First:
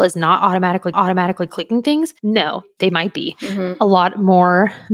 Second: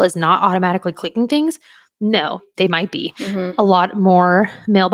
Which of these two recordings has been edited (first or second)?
first